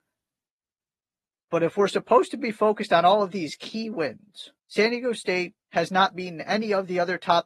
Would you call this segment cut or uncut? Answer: cut